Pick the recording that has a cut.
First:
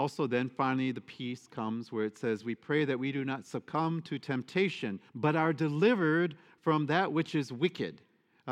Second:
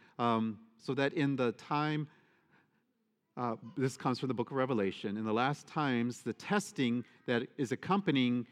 first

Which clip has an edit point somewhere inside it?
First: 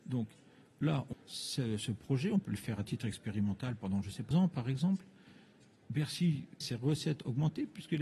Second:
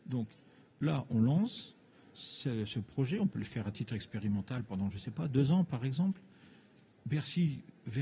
first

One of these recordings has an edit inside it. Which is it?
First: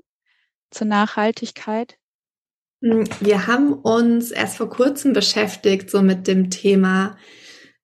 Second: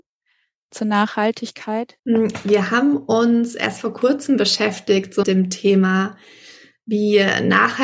second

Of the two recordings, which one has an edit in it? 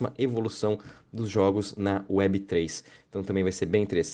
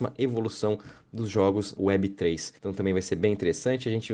second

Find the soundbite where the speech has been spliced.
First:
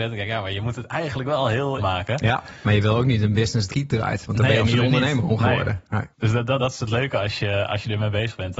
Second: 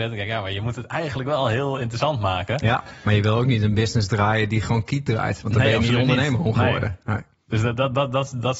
first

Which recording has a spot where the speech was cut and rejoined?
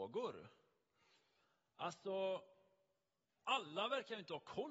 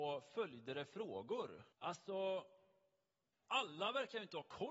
second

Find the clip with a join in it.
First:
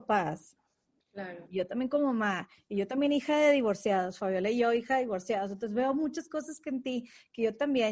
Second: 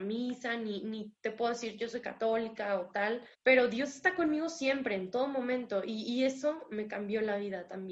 second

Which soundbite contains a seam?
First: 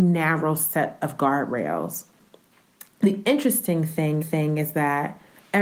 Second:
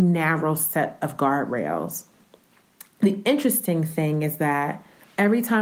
first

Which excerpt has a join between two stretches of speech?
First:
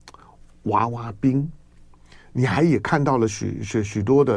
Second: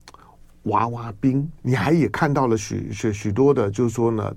second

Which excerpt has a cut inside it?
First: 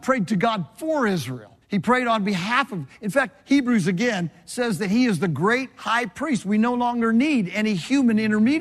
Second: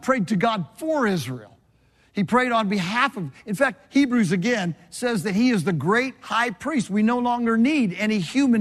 first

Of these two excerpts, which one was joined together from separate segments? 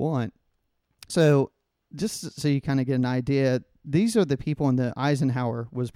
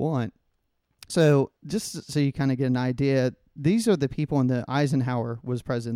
second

